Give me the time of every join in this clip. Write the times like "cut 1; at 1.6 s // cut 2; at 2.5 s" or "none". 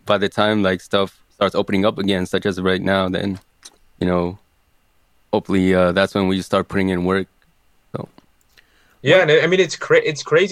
none